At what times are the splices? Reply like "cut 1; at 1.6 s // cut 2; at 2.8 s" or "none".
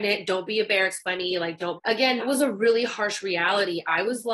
cut 1; at 1.8 s // cut 2; at 2.2 s